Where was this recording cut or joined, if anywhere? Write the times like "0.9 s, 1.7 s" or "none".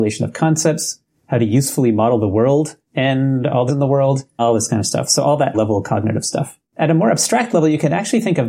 2.8 s, 3.7 s, 4.4 s, 5.5 s, 6.7 s